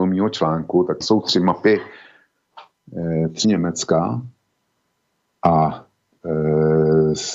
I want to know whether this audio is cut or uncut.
cut